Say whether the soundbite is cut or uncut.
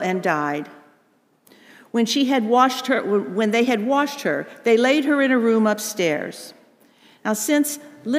uncut